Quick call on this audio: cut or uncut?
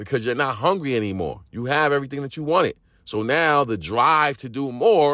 uncut